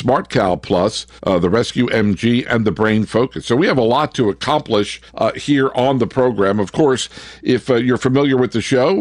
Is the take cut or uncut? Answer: cut